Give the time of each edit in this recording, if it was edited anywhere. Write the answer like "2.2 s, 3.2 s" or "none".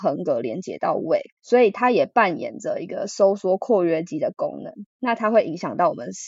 1.4 s